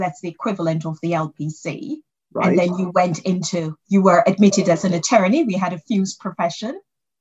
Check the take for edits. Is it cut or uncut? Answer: cut